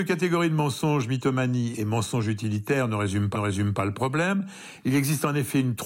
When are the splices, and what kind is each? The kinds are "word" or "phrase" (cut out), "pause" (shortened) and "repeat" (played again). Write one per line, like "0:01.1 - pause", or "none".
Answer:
0:03.3 - repeat